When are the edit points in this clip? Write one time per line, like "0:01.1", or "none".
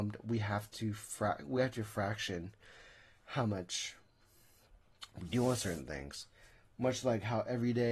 none